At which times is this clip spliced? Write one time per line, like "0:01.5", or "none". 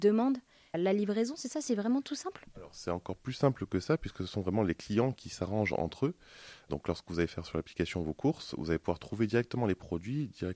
none